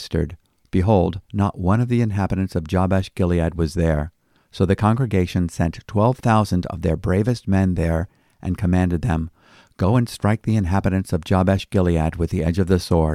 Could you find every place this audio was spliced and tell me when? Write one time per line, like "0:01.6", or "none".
none